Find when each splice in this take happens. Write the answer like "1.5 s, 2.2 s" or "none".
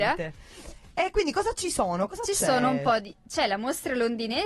none